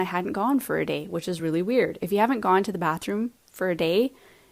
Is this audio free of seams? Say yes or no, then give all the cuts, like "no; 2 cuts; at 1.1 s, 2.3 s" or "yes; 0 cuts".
yes; 0 cuts